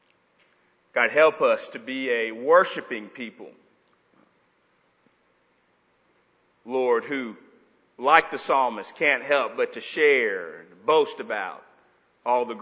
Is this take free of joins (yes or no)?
yes